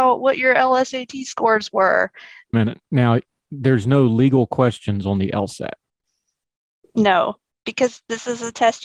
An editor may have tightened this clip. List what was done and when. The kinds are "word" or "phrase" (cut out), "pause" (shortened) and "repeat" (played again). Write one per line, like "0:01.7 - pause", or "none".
0:02.5 - phrase